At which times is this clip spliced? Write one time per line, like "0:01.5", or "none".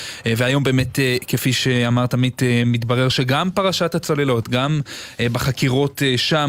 none